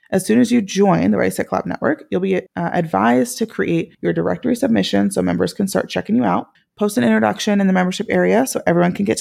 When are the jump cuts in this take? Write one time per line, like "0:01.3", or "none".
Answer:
0:02.5
0:03.9
0:06.6